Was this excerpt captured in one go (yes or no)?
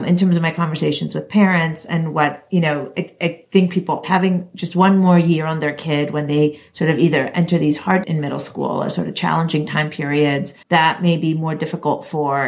no